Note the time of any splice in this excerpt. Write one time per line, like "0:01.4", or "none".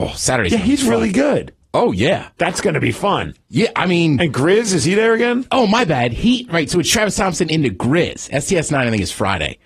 none